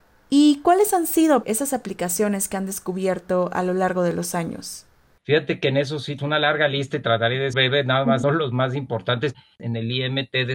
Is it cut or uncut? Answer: cut